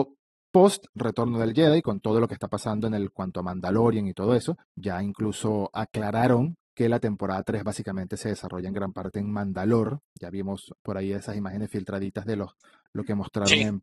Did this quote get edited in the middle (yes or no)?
yes